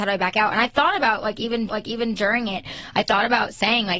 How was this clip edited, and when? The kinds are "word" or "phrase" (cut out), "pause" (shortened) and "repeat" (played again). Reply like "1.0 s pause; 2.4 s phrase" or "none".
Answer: 1.7 s repeat